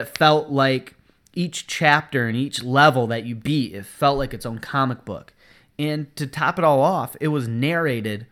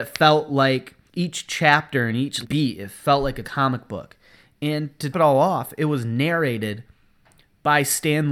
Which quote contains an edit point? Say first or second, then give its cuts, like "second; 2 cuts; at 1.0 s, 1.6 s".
second; 4 cuts; at 1.1 s, 2.4 s, 3.4 s, 5.1 s